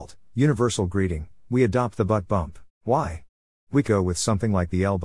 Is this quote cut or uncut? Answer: cut